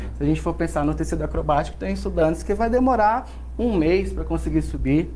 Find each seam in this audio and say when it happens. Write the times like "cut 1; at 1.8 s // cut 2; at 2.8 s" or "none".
none

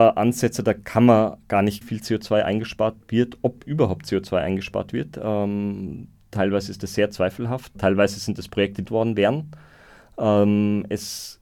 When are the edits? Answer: cut 1; at 1.8 s // cut 2; at 7.7 s // cut 3; at 8.8 s

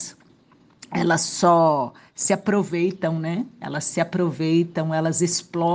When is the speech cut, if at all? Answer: none

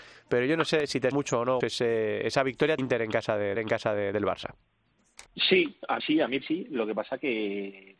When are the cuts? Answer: cut 1; at 1.1 s // cut 2; at 1.6 s // cut 3; at 2.8 s // cut 4; at 3.6 s // cut 5; at 5.3 s // cut 6; at 6.0 s // cut 7; at 6.4 s

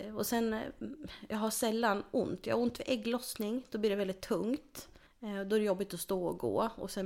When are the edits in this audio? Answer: cut 1; at 5.1 s

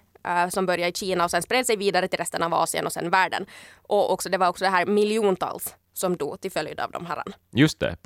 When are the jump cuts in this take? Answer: none

